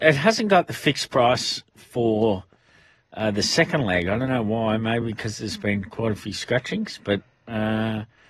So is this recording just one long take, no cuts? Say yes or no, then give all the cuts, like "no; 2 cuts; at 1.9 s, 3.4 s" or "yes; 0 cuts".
yes; 0 cuts